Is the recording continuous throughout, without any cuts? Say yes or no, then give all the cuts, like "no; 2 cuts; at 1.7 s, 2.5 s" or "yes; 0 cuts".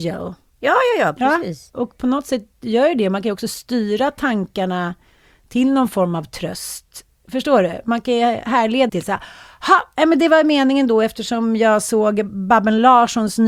no; 1 cut; at 8.9 s